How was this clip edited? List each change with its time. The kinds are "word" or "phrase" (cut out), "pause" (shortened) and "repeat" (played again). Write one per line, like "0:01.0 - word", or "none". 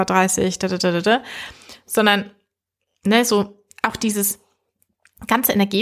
none